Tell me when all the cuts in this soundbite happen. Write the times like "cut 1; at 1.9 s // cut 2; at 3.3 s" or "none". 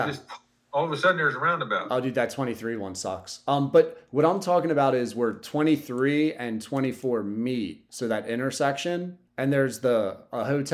cut 1; at 9.3 s